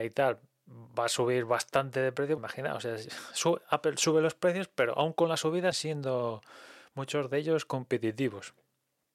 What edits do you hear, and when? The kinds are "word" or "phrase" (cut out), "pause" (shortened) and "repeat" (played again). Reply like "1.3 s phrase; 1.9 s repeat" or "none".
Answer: 2.4 s word; 5.7 s word